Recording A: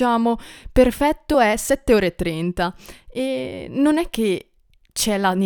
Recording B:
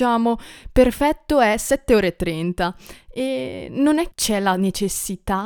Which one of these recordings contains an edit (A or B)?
B